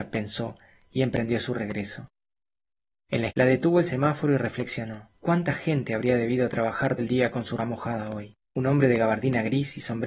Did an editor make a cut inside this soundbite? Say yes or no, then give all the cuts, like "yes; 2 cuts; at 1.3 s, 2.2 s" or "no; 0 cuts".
yes; 5 cuts; at 3.3 s, 5.2 s, 7.0 s, 7.6 s, 8.4 s